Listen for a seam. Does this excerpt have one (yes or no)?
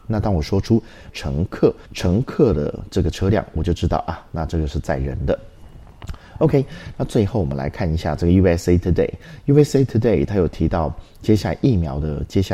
yes